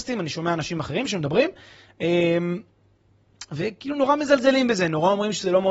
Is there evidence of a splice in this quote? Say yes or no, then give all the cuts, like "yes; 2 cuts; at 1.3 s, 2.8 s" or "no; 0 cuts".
no; 0 cuts